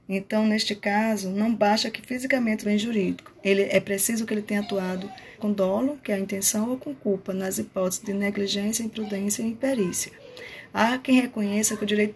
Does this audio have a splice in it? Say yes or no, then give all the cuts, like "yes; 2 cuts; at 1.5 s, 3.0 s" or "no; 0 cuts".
yes; 2 cuts; at 2.6 s, 5.4 s